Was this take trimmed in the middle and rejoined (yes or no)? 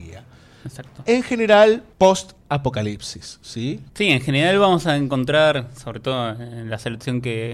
yes